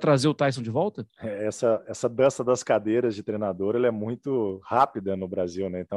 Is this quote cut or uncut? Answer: cut